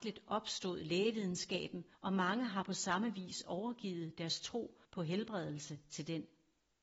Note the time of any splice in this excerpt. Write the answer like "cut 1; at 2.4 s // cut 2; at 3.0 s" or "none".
cut 1; at 1.9 s // cut 2; at 4.8 s